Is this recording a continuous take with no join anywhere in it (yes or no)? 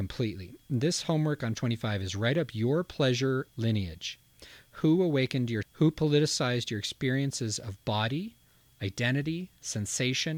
no